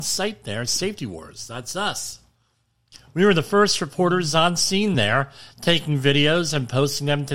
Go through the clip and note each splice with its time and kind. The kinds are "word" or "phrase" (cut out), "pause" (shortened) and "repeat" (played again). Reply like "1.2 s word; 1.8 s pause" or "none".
none